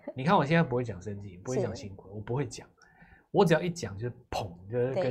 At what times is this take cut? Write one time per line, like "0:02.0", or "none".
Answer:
none